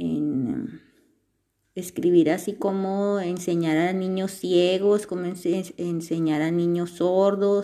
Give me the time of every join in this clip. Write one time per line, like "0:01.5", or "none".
none